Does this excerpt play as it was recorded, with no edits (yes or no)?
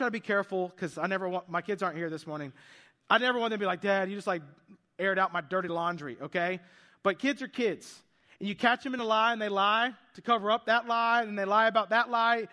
yes